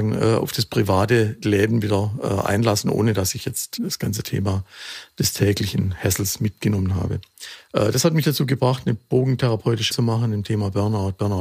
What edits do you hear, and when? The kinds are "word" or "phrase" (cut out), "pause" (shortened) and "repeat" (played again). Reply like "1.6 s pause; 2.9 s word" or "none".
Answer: 3.8 s word; 9.9 s word